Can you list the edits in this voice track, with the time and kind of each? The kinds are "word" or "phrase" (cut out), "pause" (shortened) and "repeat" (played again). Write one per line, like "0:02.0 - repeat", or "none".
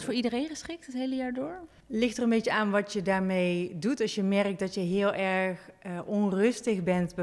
0:01.8 - pause